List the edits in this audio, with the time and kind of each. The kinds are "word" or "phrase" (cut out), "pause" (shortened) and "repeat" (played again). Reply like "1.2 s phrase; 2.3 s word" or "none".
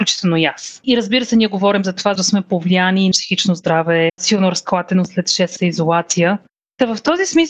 2.2 s word; 3.1 s word; 4.1 s word; 5.6 s word